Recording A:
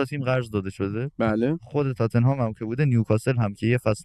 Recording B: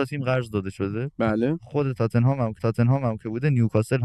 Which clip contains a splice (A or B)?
B